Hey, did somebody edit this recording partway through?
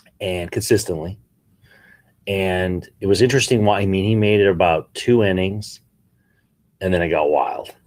no; 0 cuts

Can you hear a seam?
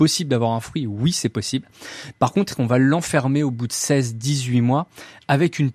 no; 0 cuts

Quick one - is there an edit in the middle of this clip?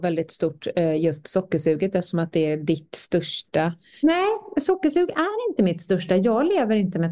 no; 0 cuts

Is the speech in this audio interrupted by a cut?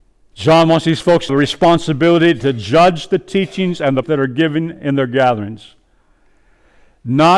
yes; 2 cuts; at 1.3 s, 4.0 s

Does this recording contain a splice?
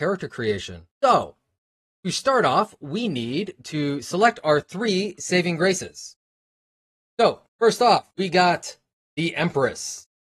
yes; 4 cuts; at 0.9 s, 7.5 s, 8.1 s, 8.9 s

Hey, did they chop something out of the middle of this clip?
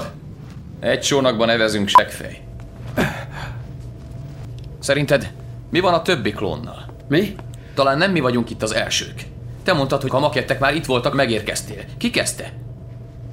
yes; 2 cuts; at 10.1 s, 11.1 s

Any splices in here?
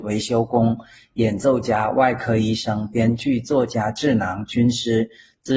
no; 0 cuts

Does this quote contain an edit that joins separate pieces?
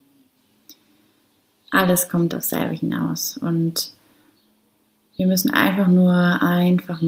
no; 0 cuts

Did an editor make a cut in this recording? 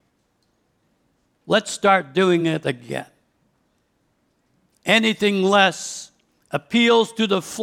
no; 0 cuts

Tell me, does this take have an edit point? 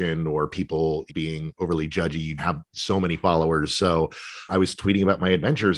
yes; 3 cuts; at 1.1 s, 2.4 s, 4.5 s

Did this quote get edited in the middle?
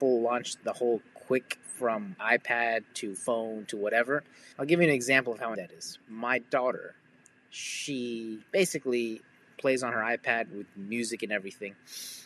yes; 5 cuts; at 1.6 s, 2.1 s, 4.5 s, 5.5 s, 8.5 s

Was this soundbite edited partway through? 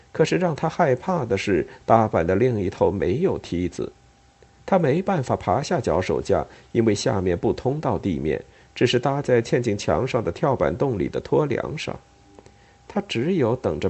no; 0 cuts

